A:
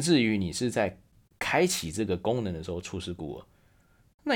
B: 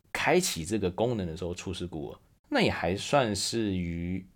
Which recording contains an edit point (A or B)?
B